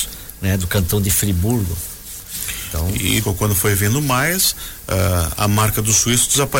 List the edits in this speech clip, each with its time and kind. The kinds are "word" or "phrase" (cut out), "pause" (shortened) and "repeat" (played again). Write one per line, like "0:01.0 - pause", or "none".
0:03.2 - word